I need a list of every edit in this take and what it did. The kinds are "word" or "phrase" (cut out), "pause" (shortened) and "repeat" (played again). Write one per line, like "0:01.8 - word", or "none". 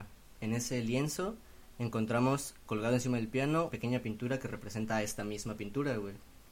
0:02.6 - word
0:03.7 - word